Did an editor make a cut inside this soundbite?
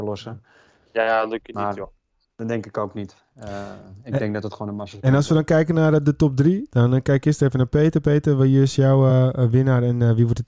no; 0 cuts

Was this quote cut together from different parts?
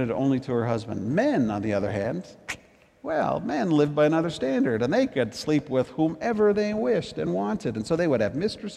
no; 0 cuts

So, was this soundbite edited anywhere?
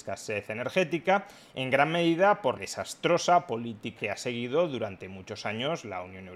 yes; 2 cuts; at 2.6 s, 4.0 s

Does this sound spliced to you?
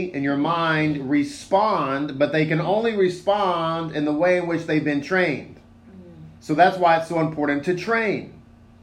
yes; 1 cut; at 6.4 s

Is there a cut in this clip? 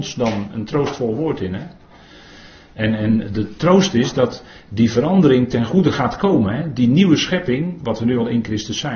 no; 0 cuts

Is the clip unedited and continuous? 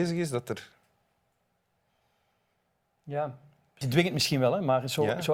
no; 1 cut; at 3.8 s

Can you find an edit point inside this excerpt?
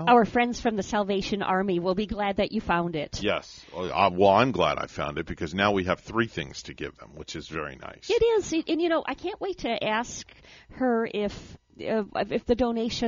no; 0 cuts

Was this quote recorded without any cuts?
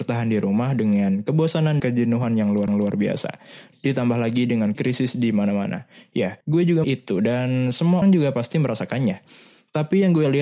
no; 6 cuts; at 1.8 s, 2.7 s, 4.7 s, 6.4 s, 6.8 s, 8.0 s

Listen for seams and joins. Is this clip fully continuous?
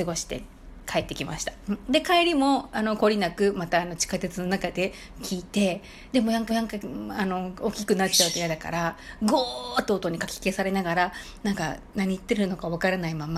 no; 1 cut; at 6.5 s

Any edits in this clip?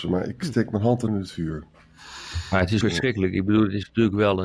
yes; 2 cuts; at 1.1 s, 2.8 s

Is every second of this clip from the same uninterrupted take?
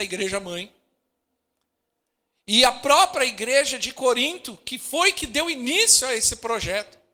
yes; 0 cuts

